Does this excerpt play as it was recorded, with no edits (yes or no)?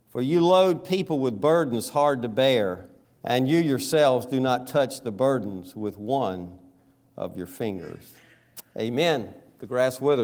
no